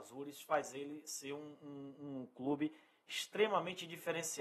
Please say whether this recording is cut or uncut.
uncut